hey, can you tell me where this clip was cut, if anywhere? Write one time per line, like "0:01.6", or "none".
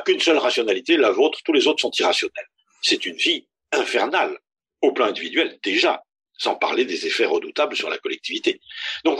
none

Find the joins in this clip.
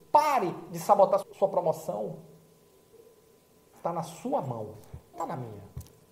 0:01.2
0:05.1

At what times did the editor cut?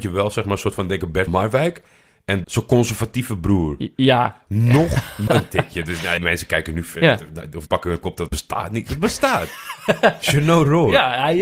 0:01.3
0:02.4
0:05.3
0:06.2
0:07.7
0:08.3

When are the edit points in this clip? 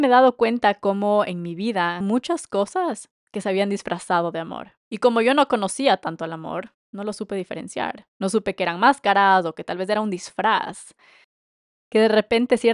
0:02.0
0:04.8

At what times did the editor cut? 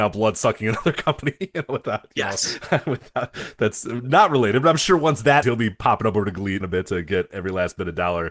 0:05.4
0:06.6

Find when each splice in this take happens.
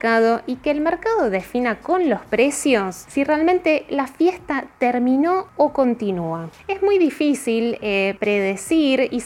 none

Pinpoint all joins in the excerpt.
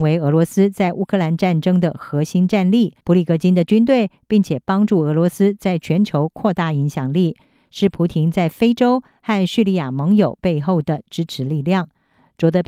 0:03.0

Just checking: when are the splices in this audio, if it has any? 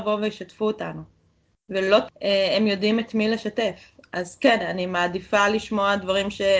0:02.1

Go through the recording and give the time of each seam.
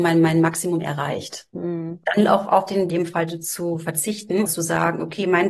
0:01.5
0:02.9
0:04.5

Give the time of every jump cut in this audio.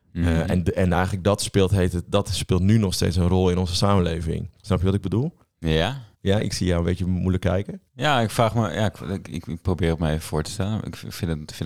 0:04.6
0:06.1
0:07.9

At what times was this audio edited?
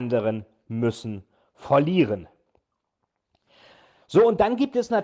none

